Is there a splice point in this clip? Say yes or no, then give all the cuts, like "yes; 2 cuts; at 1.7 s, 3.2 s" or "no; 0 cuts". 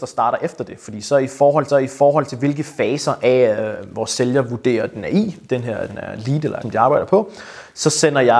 yes; 3 cuts; at 1.7 s, 5.9 s, 6.6 s